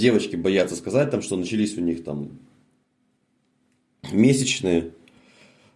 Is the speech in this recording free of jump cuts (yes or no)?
yes